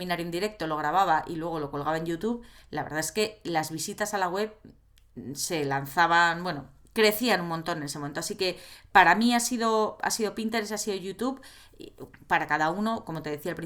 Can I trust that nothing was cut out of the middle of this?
yes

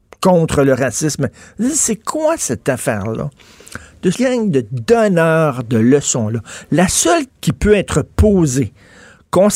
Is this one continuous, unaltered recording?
no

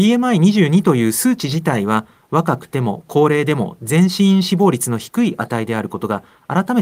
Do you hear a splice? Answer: no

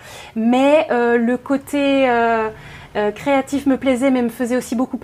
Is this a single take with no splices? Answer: yes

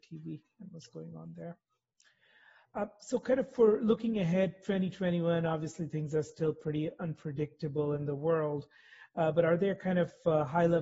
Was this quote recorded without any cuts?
yes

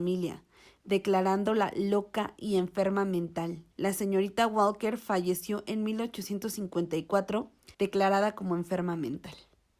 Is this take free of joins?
no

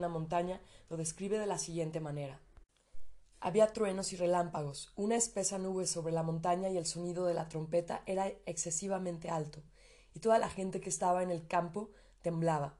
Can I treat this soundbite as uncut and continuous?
yes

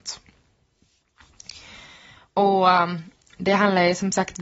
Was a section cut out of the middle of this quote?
no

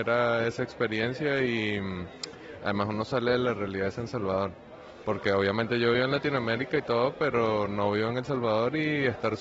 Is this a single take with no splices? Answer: yes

